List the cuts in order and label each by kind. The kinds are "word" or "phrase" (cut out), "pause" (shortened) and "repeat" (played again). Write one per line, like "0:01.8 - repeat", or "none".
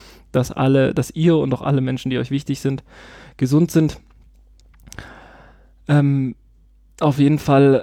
none